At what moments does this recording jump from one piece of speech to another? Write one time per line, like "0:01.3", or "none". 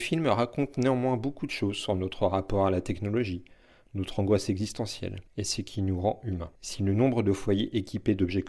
0:05.3
0:06.6